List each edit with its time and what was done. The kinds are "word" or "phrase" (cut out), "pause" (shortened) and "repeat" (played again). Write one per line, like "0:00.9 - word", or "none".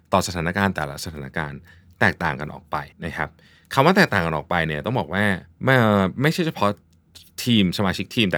0:02.9 - pause
0:05.5 - pause